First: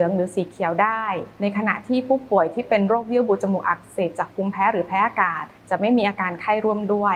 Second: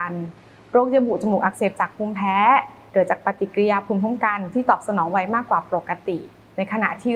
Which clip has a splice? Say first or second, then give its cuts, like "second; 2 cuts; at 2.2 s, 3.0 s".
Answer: first; 1 cut; at 5.6 s